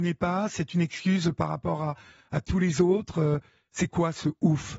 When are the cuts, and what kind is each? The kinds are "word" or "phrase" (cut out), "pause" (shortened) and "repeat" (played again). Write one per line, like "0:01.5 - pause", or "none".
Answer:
none